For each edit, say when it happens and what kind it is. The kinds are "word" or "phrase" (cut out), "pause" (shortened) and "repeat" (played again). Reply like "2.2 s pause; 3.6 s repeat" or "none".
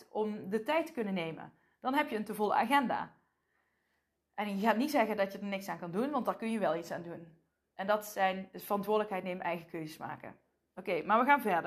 none